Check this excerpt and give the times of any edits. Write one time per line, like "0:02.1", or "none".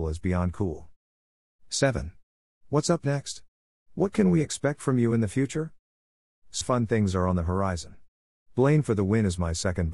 0:06.6